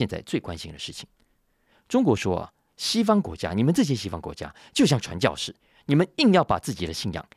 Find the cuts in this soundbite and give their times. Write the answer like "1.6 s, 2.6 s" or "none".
none